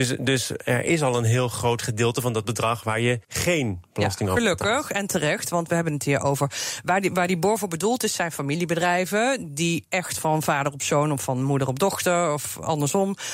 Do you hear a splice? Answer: yes; 1 cut; at 3.2 s

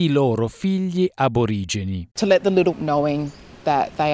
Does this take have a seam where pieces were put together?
yes; 2 cuts; at 2.1 s, 2.7 s

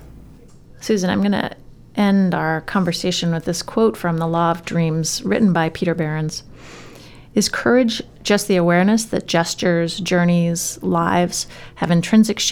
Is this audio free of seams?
yes; 0 cuts

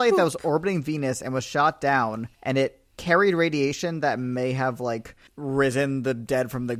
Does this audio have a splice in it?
yes; 3 cuts; at 2.3 s, 2.9 s, 5.3 s

